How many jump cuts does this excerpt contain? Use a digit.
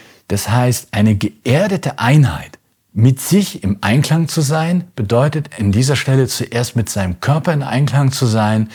0